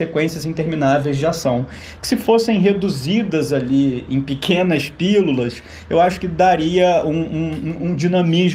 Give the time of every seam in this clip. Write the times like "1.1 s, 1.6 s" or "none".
none